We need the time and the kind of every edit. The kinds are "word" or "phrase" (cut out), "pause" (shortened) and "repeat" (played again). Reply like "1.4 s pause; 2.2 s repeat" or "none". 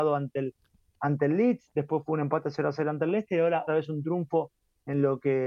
3.7 s word